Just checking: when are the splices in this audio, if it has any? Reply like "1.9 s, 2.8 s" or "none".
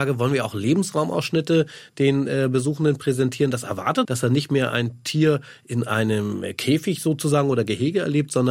4.0 s